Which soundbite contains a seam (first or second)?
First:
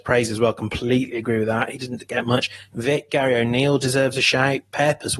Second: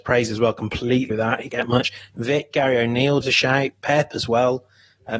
second